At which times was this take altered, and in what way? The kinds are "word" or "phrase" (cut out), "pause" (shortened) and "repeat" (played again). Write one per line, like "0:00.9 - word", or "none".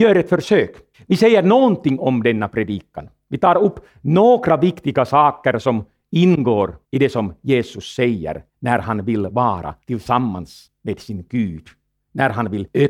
0:00.9 - pause
0:06.8 - pause
0:08.5 - pause
0:09.8 - pause